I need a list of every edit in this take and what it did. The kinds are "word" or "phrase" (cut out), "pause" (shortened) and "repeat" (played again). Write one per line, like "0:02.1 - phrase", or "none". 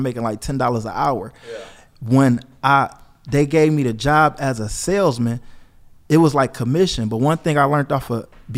none